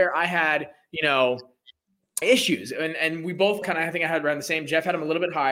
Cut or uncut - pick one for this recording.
cut